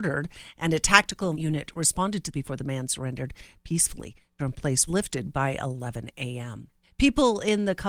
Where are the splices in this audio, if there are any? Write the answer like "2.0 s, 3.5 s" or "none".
1.3 s, 2.3 s, 4.4 s, 4.9 s, 6.8 s